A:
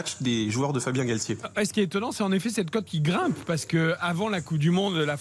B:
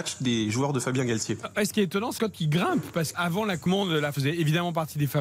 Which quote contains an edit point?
B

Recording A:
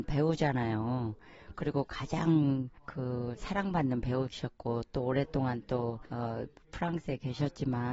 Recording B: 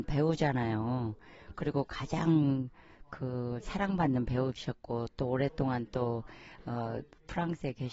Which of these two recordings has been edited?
A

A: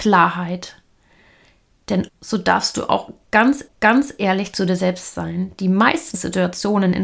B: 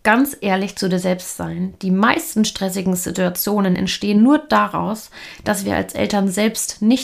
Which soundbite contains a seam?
A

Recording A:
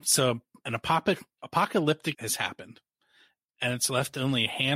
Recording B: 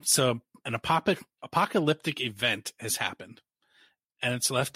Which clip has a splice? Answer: A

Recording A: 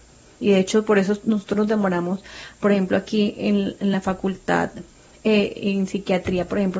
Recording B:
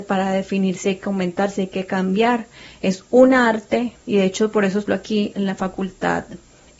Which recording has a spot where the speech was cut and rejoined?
B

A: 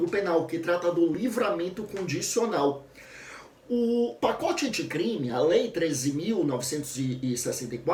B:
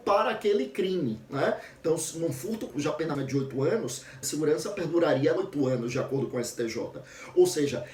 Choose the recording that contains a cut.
B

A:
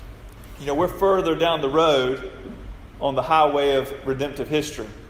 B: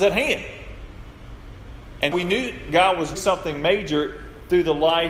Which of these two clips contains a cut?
B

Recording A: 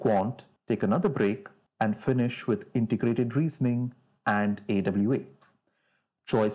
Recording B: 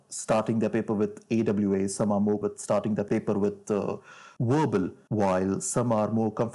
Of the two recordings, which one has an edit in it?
B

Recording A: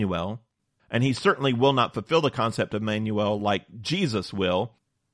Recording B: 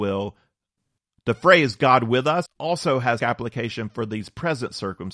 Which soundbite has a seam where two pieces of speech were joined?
B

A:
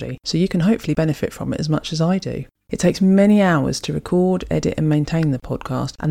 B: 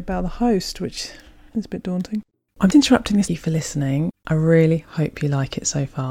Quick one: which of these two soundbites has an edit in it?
B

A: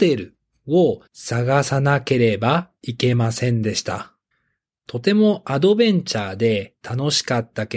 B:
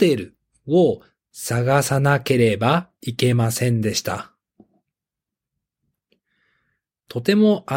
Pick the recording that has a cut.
A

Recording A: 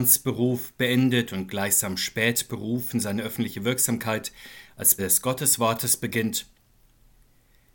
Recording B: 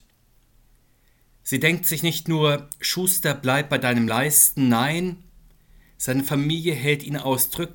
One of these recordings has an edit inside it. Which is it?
A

